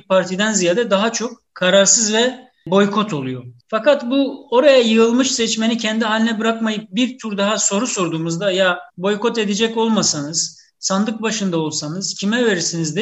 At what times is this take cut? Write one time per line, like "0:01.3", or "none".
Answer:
0:08.9